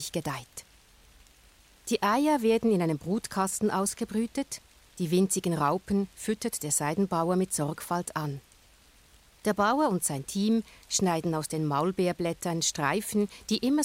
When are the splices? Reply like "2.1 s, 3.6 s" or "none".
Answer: none